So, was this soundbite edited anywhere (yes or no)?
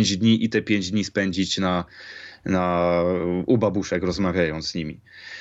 no